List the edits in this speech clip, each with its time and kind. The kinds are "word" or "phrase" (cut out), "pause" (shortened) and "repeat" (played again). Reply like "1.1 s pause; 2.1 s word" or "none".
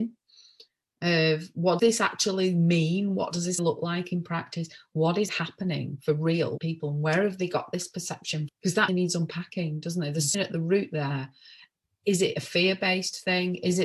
1.8 s word; 3.6 s word; 5.3 s word; 6.6 s word; 8.5 s word; 8.9 s word; 10.3 s word